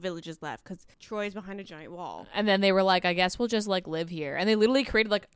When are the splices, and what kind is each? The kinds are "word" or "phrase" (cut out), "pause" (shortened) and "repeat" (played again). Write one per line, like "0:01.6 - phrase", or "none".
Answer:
0:00.9 - pause

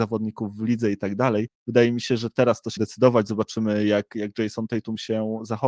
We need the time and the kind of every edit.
0:02.8 - word

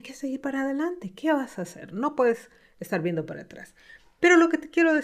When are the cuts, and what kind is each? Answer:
none

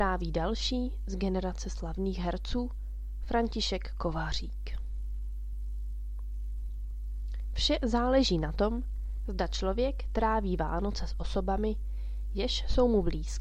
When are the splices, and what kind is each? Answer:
none

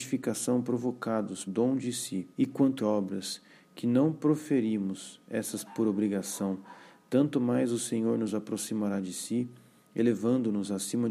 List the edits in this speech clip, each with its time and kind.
0:01.5 - word
0:02.3 - pause
0:02.8 - phrase
0:05.7 - word

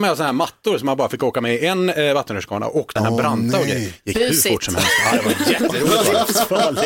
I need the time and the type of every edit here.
0:03.0 - phrase

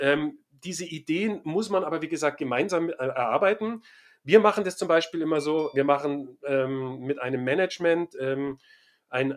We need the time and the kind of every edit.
none

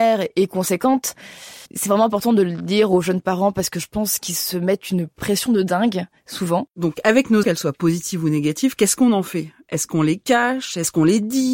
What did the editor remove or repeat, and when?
0:01.7 - pause
0:07.4 - word

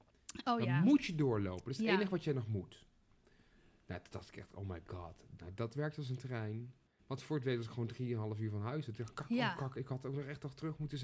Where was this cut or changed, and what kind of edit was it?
none

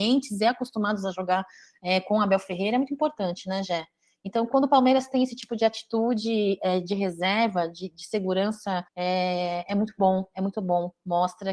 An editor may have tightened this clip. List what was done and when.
0:08.9 - pause

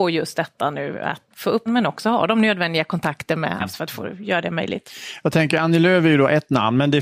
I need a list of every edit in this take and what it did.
0:01.3 - word
0:01.7 - word
0:03.6 - phrase

